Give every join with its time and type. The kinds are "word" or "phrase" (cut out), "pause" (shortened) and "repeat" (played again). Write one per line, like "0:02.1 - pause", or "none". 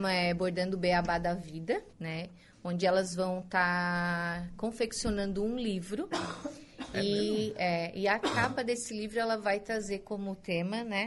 0:01.9 - pause